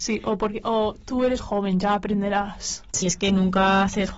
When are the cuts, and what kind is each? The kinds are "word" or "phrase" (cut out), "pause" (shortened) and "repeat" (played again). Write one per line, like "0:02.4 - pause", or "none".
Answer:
0:01.4 - word
0:03.0 - word